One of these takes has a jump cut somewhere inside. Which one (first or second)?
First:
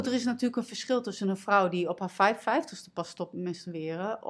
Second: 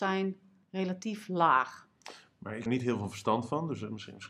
second